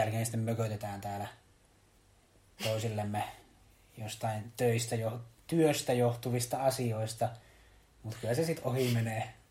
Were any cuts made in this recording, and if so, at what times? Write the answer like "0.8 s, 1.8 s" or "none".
none